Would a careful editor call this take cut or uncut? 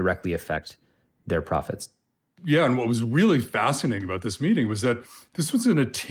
uncut